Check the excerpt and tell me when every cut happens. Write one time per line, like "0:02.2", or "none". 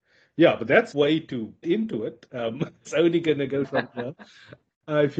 0:00.9
0:01.6
0:02.9
0:03.6

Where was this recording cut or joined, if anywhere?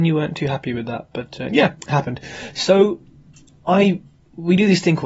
none

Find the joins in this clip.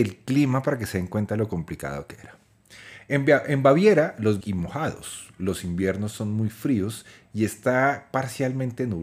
0:04.4

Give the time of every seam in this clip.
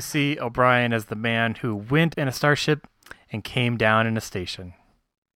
0:02.1

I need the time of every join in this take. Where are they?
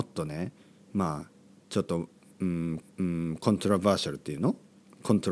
0:02.8

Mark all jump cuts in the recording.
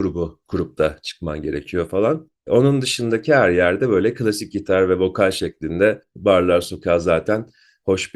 none

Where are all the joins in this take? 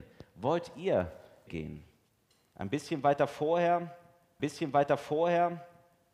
0:01.5
0:04.4

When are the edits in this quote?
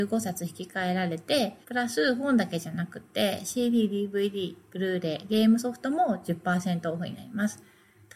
0:01.6

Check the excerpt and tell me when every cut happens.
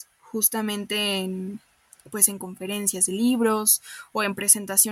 none

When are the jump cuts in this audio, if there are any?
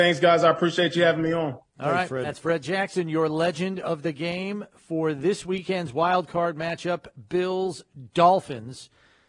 none

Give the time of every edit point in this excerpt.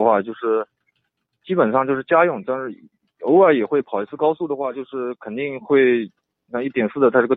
none

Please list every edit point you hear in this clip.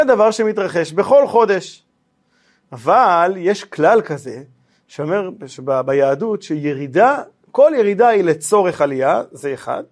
none

